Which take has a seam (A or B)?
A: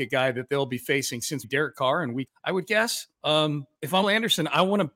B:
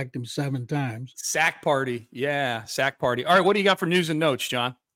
A